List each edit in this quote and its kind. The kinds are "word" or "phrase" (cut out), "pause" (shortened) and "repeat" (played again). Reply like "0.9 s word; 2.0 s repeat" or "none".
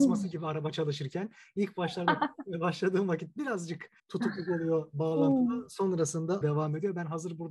4.0 s pause; 6.4 s word